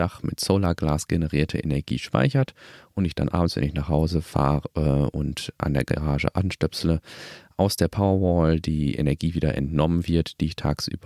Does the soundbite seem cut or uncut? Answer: uncut